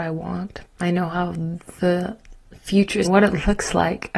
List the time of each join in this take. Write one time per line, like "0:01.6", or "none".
0:03.0